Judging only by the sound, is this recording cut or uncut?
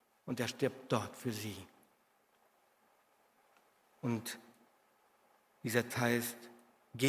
cut